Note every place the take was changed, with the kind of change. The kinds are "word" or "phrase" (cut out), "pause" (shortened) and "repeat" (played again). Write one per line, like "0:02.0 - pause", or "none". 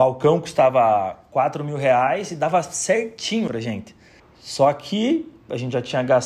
0:03.5 - word
0:04.2 - pause